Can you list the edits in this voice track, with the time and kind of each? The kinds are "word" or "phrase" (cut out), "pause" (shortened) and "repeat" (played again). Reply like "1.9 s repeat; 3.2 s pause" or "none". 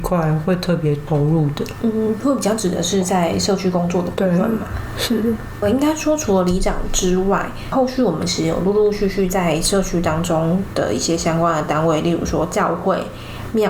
5.6 s word